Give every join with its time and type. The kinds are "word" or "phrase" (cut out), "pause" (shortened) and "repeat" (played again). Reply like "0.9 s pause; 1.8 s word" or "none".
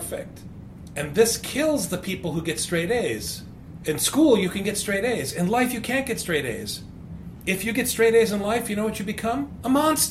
none

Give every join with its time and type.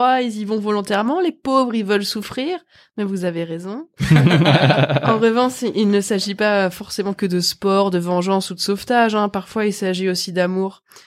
none

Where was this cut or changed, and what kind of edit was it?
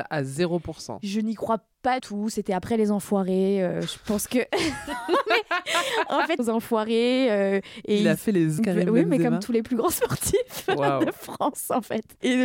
2.0 s word; 6.4 s phrase; 8.6 s word

